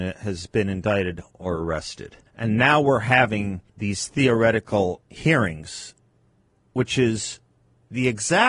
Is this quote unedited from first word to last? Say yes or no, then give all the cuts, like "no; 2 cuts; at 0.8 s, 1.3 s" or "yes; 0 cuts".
no; 3 cuts; at 2.3 s, 3.7 s, 5.1 s